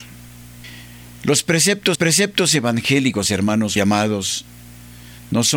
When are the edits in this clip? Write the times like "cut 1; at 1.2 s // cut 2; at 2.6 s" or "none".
cut 1; at 1.9 s // cut 2; at 3.8 s